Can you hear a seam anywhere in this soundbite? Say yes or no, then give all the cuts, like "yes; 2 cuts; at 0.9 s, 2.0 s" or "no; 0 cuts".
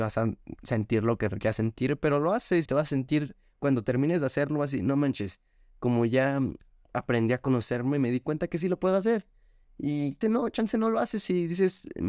yes; 2 cuts; at 2.7 s, 10.2 s